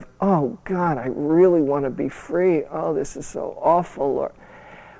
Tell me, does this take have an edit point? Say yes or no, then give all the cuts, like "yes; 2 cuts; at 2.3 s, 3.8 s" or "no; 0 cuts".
no; 0 cuts